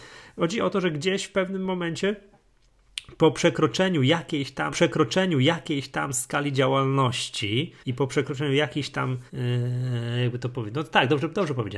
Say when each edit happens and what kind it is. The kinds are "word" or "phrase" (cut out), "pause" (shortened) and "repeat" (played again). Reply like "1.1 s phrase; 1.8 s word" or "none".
4.7 s repeat; 7.8 s pause; 9.3 s pause